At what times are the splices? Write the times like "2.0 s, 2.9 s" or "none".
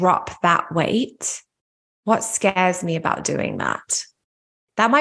none

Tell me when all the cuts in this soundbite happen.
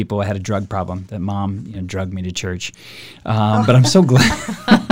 none

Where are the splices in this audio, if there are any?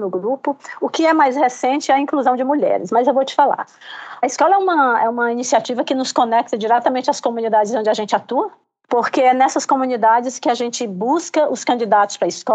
none

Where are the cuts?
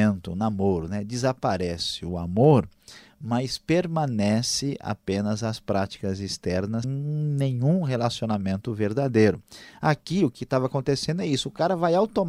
6.8 s

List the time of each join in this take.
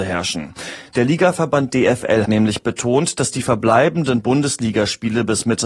2.2 s

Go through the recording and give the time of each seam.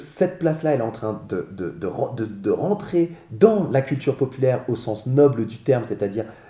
none

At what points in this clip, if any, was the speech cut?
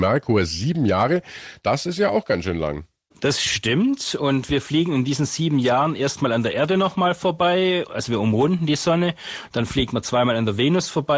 none

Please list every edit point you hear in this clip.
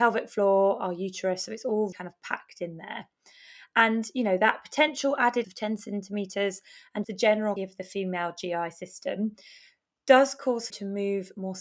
1.9 s, 5.4 s, 7.0 s, 7.6 s, 10.7 s

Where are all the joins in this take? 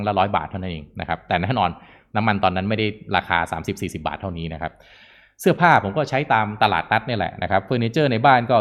none

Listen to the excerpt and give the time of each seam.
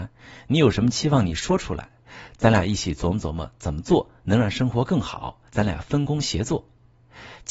5.5 s

